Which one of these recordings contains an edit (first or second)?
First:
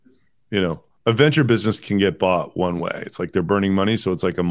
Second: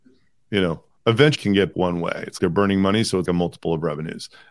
second